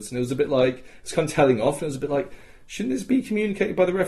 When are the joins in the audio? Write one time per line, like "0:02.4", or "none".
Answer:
none